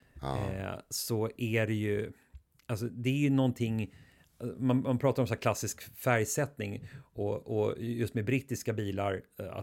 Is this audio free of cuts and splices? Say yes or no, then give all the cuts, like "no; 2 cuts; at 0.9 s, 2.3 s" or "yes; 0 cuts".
yes; 0 cuts